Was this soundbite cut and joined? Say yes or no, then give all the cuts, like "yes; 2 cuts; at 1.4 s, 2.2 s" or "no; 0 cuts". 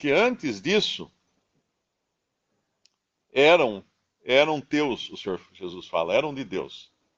no; 0 cuts